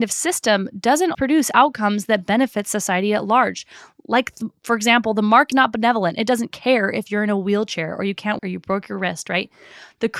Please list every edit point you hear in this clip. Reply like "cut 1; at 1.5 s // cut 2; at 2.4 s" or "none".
cut 1; at 1.1 s // cut 2; at 5.5 s // cut 3; at 8.4 s